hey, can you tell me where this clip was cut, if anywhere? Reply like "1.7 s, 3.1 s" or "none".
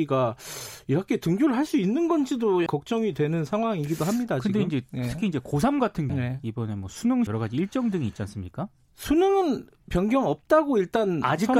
2.7 s, 6.1 s, 7.3 s

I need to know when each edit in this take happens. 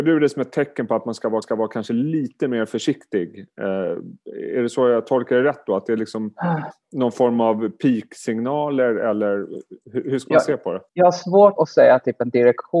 1.4 s, 9.8 s, 10.9 s, 11.6 s

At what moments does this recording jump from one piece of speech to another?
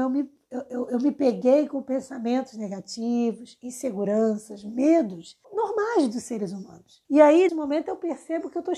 5.4 s, 7.0 s, 7.5 s

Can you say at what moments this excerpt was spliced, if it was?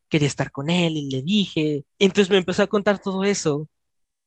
1.9 s

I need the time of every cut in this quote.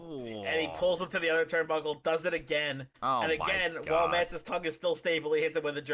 2.9 s

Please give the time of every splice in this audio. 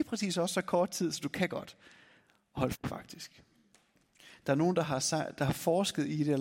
2.8 s

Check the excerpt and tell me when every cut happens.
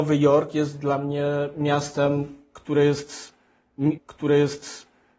4.0 s

